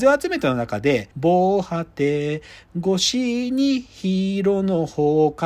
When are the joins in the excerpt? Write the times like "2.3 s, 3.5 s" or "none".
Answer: 1.1 s